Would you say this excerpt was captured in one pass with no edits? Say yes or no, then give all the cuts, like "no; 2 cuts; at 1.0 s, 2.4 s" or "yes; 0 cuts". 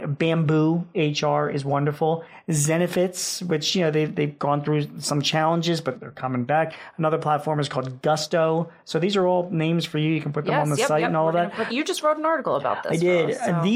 no; 2 cuts; at 5.9 s, 11.7 s